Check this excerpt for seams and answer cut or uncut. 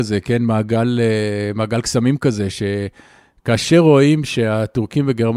uncut